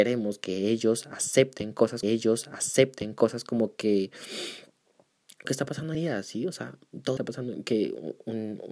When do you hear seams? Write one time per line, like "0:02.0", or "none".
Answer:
0:02.0
0:05.4
0:05.9
0:07.2